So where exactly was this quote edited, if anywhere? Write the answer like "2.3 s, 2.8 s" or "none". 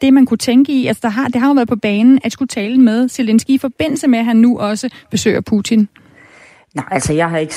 2.3 s